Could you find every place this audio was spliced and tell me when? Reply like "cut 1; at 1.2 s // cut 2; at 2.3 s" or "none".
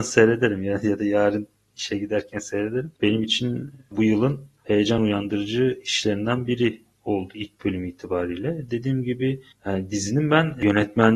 none